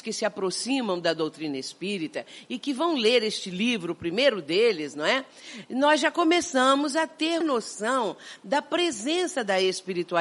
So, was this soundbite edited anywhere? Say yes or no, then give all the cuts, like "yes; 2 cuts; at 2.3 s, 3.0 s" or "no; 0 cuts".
yes; 1 cut; at 7.4 s